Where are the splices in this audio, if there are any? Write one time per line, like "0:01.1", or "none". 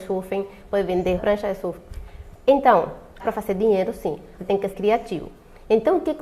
0:01.2
0:03.2
0:04.4
0:04.7